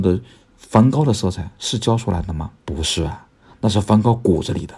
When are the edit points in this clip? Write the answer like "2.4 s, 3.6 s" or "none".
2.6 s